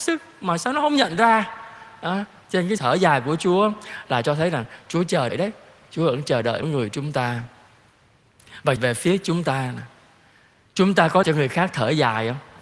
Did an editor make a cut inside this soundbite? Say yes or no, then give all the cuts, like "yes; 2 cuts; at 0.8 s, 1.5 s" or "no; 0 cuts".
yes; 5 cuts; at 2.8 s, 5.3 s, 6.6 s, 8.8 s, 11.2 s